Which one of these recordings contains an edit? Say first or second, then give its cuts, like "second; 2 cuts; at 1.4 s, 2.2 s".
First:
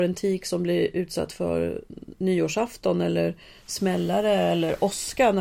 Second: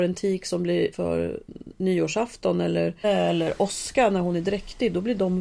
second; 2 cuts; at 0.9 s, 3.0 s